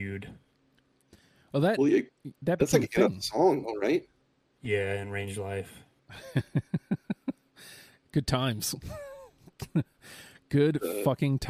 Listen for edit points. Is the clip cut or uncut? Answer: uncut